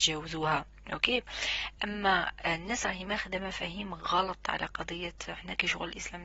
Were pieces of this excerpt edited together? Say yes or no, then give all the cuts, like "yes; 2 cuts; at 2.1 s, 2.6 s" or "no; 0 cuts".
no; 0 cuts